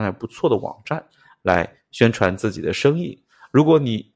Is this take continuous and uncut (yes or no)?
yes